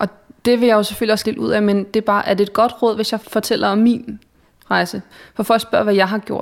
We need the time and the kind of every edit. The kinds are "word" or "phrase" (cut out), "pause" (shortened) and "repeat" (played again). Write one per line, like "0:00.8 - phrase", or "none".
0:01.2 - word
0:03.2 - word